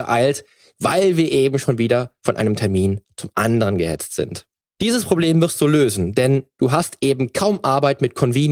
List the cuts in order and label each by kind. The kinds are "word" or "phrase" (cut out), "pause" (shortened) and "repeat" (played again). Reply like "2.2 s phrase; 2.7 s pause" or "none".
4.6 s pause